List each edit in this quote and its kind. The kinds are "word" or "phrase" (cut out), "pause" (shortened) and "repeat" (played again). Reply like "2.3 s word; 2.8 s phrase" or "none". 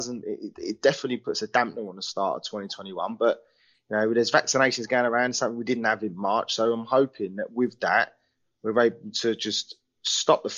none